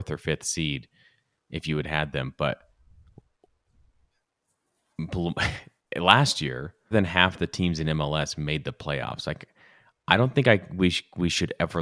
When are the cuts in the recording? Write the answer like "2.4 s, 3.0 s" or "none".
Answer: 6.9 s